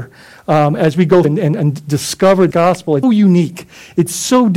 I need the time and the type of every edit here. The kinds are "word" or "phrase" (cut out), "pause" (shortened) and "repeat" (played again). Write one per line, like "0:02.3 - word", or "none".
0:01.2 - word
0:02.5 - word
0:03.0 - word